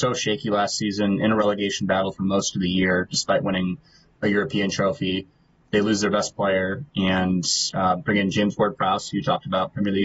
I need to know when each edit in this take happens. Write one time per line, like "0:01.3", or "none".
none